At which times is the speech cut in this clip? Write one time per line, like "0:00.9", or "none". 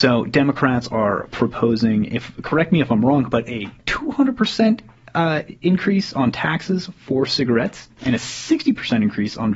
0:03.8